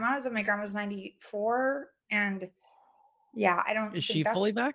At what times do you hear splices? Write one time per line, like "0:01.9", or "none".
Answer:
none